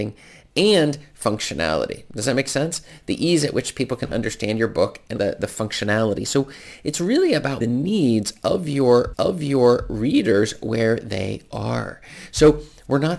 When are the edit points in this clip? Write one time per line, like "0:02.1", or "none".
0:05.2
0:07.6
0:09.1